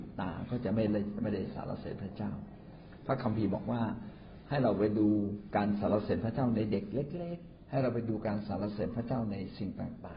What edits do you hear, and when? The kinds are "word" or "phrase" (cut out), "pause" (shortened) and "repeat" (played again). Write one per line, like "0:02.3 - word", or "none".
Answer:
0:07.7 - word